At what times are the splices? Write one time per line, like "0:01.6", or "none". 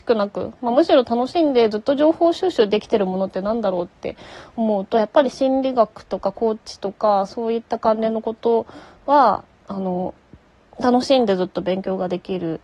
none

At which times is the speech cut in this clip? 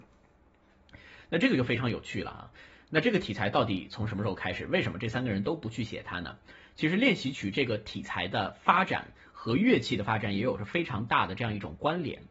none

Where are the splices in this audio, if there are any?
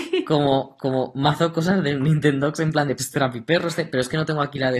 0:03.0

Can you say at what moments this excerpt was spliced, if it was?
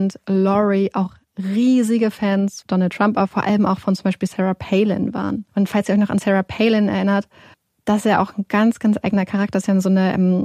0:02.6
0:05.5
0:07.5

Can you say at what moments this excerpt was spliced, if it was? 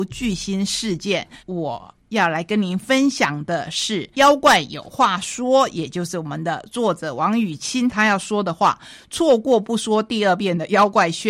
0:01.4
0:04.1

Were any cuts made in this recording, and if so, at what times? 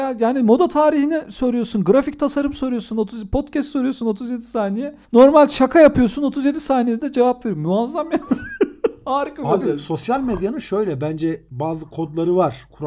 0:05.1

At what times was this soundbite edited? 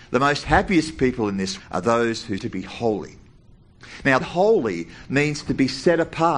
0:01.6
0:02.4
0:04.2

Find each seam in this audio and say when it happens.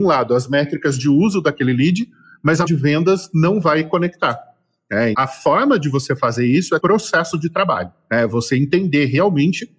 0:02.7
0:05.1
0:06.8

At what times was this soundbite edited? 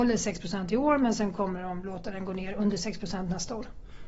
none

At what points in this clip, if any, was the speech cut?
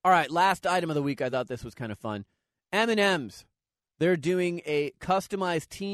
none

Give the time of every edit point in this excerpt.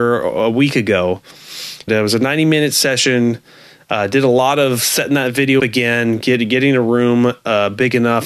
0:01.9
0:05.6

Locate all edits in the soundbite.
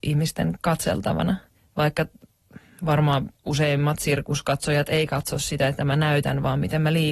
0:03.4
0:05.8

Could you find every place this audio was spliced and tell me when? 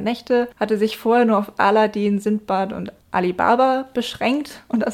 0:03.0

